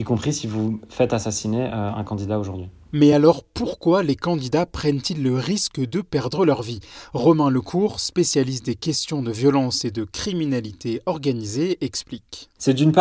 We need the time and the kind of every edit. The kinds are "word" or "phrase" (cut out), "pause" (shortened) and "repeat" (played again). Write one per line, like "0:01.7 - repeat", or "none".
none